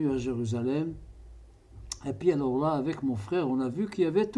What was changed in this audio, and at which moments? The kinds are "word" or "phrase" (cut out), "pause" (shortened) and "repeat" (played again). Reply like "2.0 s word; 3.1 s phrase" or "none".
none